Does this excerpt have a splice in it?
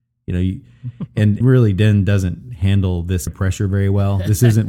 yes; 2 cuts; at 1.4 s, 3.3 s

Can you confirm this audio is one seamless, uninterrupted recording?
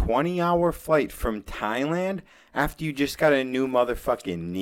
yes; 0 cuts

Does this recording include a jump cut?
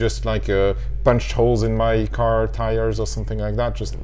no; 0 cuts

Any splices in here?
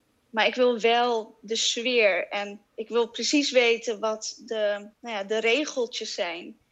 yes; 2 cuts; at 2.7 s, 4.9 s

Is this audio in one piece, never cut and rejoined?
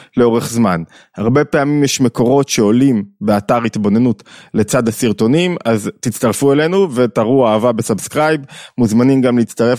yes; 0 cuts

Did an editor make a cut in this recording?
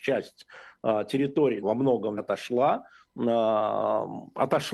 yes; 2 cuts; at 1.6 s, 2.2 s

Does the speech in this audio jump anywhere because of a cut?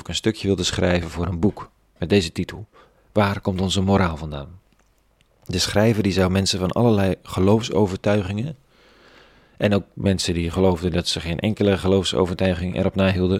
no; 0 cuts

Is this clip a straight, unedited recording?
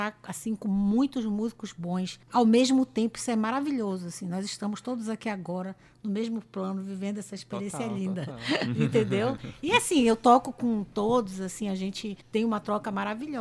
no; 2 cuts; at 2.2 s, 12.2 s

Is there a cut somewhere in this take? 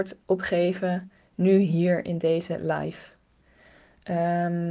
no; 0 cuts

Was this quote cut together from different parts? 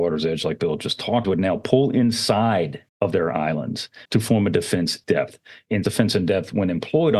yes; 5 cuts; at 1.2 s, 2.9 s, 4.1 s, 5.0 s, 5.8 s

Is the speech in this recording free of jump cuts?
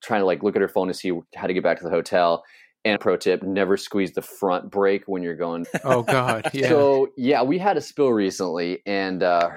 no; 2 cuts; at 3.0 s, 5.6 s

